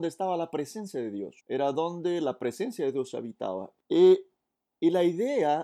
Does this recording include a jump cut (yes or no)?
yes